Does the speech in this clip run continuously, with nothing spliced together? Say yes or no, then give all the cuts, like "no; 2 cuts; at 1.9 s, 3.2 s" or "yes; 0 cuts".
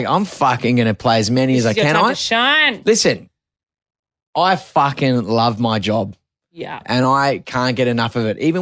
yes; 0 cuts